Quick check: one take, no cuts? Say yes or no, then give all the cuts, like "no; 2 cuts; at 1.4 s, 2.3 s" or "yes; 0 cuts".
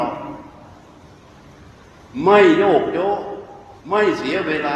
no; 1 cut; at 3.8 s